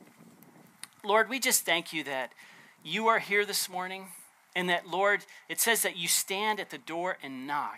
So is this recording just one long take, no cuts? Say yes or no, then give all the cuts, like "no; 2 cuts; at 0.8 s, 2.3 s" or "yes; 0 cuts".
yes; 0 cuts